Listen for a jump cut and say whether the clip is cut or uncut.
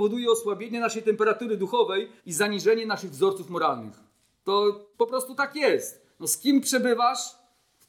cut